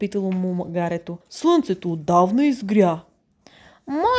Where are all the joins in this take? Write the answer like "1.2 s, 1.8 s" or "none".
1.2 s